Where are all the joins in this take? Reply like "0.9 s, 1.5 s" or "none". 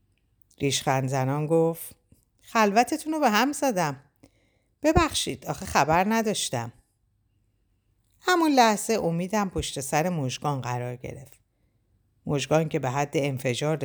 none